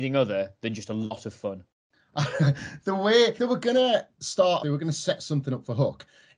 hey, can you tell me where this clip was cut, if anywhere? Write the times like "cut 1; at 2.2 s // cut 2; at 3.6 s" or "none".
cut 1; at 1.7 s // cut 2; at 3.4 s // cut 3; at 4.6 s